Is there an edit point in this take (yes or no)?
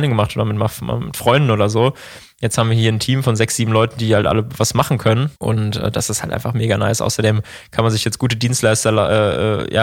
yes